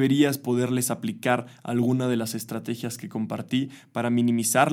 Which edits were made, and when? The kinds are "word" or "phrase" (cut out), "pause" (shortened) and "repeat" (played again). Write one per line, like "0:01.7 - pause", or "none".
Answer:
none